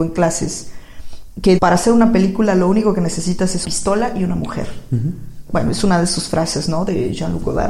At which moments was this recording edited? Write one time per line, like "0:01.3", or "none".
0:01.6
0:03.6